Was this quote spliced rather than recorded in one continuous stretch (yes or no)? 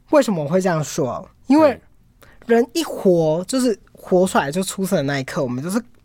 no